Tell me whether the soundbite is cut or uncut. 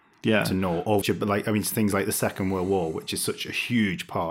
cut